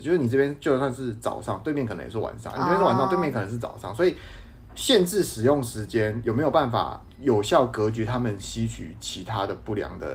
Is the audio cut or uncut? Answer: uncut